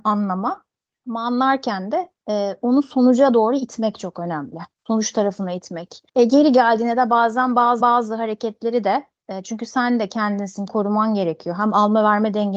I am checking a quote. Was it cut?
yes; 4 cuts; at 4.7 s, 6.1 s, 7.8 s, 10.7 s

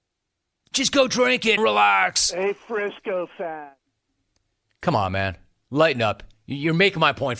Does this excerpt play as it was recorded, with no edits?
no; 1 cut; at 1.6 s

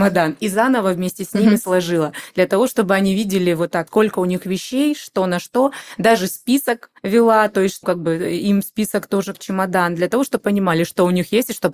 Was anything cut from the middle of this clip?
yes; 5 cuts; at 3.9 s, 7.0 s, 7.8 s, 9.3 s, 10.4 s

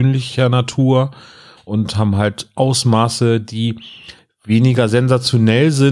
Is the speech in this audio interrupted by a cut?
no; 0 cuts

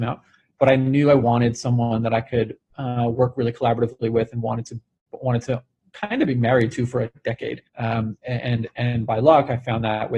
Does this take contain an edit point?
yes; 1 cut; at 7.7 s

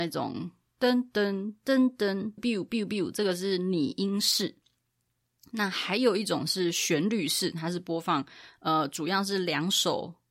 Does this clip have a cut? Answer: yes; 1 cut; at 2.4 s

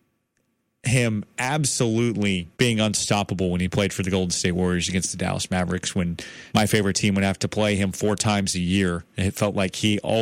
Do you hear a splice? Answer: yes; 2 cuts; at 2.5 s, 6.5 s

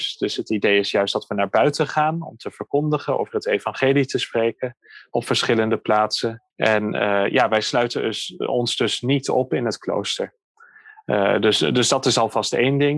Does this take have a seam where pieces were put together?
yes; 1 cut; at 6.5 s

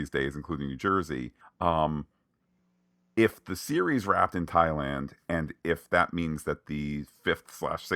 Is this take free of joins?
no; 1 cut; at 1.4 s

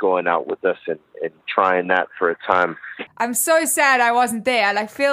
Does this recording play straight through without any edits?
yes; 0 cuts

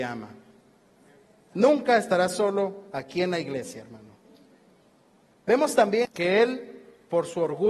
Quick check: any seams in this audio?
yes; 2 cuts; at 4.9 s, 6.0 s

